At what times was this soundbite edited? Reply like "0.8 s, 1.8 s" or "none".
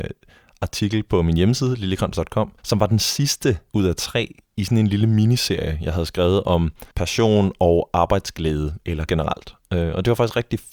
2.6 s, 3.7 s, 6.9 s, 9.1 s

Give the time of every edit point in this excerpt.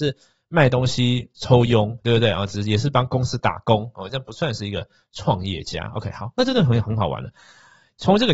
none

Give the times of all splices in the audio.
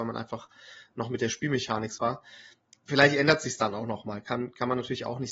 2.0 s

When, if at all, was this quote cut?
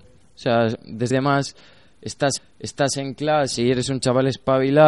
1.1 s, 2.4 s

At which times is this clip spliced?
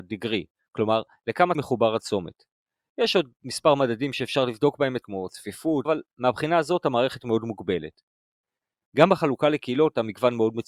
1.5 s, 5.0 s, 5.9 s

